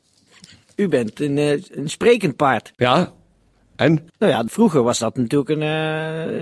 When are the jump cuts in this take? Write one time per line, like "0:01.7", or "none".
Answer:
0:02.7
0:04.1